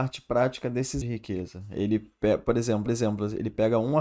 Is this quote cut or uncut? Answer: cut